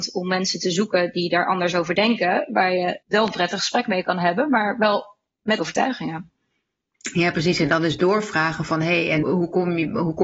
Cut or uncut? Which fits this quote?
cut